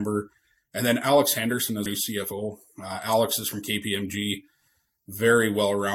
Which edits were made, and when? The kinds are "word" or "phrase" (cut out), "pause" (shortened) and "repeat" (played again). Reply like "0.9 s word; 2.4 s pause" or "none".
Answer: 1.9 s word